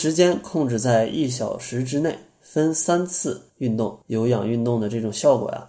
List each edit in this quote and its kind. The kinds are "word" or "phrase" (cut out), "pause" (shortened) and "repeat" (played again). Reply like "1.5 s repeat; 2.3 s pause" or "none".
3.5 s pause; 4.0 s pause